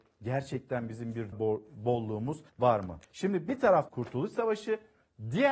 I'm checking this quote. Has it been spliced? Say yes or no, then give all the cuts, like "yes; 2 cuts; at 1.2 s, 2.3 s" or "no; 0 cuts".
yes; 4 cuts; at 1.3 s, 2.5 s, 3.0 s, 3.9 s